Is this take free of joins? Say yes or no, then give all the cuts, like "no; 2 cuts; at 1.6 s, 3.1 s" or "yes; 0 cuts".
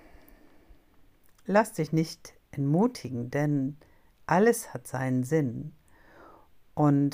yes; 0 cuts